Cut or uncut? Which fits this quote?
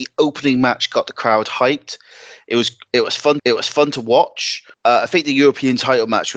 cut